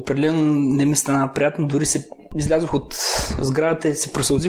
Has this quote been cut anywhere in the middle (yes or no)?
no